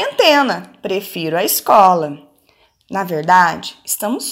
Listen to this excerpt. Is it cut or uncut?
uncut